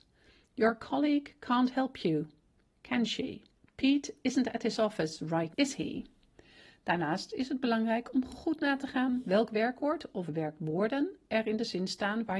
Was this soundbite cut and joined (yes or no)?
yes